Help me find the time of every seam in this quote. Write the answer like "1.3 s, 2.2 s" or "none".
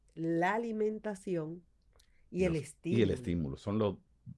none